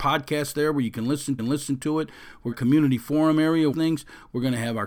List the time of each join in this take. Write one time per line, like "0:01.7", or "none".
0:01.4
0:02.5
0:03.7